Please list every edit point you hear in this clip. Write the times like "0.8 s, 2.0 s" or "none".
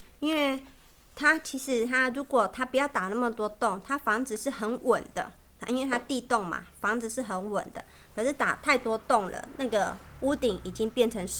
none

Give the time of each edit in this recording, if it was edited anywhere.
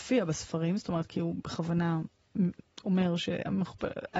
none

